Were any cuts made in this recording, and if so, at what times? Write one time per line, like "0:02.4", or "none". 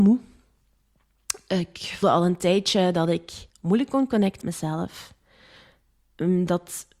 0:02.0
0:03.5
0:04.4